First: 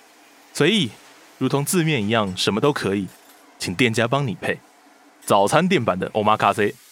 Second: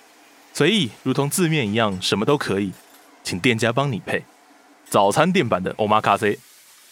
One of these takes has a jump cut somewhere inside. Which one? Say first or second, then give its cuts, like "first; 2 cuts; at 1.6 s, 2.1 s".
second; 1 cut; at 1.0 s